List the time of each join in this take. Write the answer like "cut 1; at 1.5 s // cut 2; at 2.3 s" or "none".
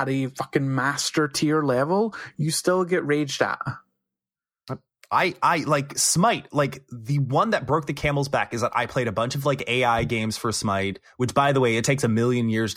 none